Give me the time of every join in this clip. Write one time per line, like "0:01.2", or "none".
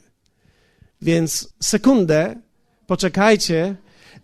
0:01.5